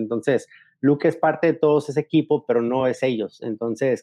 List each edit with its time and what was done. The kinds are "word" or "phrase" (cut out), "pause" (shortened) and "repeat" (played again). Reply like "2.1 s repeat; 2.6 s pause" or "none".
none